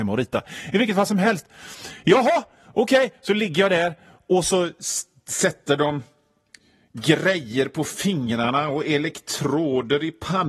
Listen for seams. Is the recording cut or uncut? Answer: uncut